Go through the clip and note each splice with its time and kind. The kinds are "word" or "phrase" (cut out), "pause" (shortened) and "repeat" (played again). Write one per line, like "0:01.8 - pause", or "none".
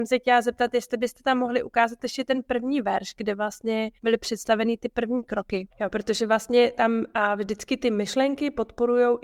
0:04.0 - pause
0:05.7 - pause